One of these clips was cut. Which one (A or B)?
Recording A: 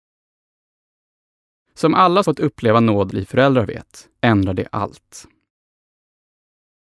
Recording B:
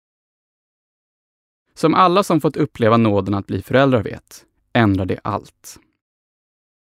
A